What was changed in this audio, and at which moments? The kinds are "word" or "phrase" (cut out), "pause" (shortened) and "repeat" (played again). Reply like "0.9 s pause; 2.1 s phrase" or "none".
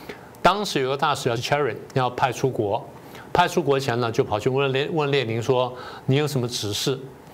1.4 s word

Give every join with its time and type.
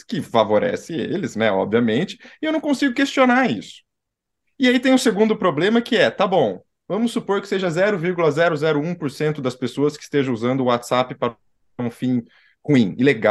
none

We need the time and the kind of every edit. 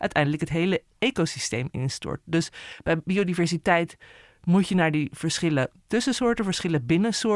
none

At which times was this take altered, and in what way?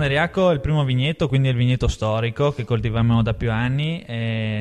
none

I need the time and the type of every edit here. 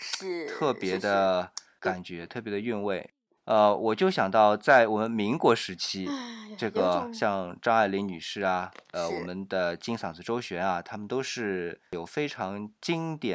8.8 s pause

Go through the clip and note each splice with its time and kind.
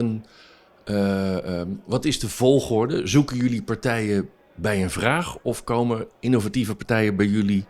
none

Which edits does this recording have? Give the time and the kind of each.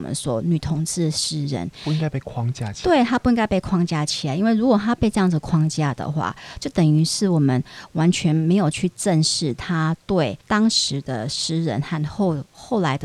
10.4 s pause

